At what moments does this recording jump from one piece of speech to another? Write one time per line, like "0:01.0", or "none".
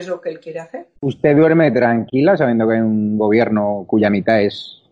0:01.0

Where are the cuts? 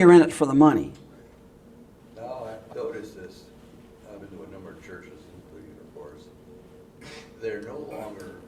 0:02.7
0:04.2
0:05.8

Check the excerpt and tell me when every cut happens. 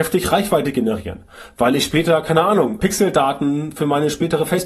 0:02.8

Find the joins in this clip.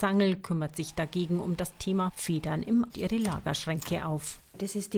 0:02.9

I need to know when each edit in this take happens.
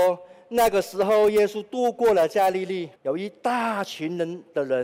0:03.0

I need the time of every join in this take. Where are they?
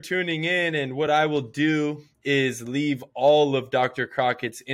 none

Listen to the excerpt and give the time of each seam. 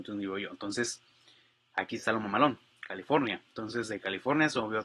none

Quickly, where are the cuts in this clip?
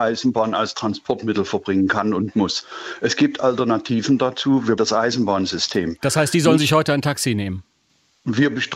0:04.8

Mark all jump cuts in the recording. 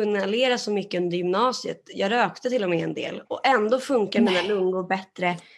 none

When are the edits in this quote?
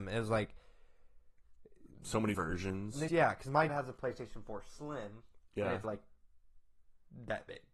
0:02.3
0:03.1
0:03.7
0:05.8

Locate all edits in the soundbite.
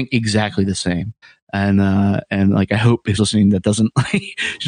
0:01.2
0:03.2

